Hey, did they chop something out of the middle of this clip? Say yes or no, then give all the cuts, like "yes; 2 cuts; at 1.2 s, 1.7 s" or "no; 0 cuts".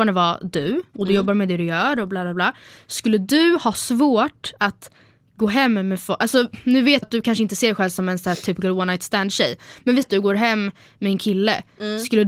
yes; 2 cuts; at 7.0 s, 10.0 s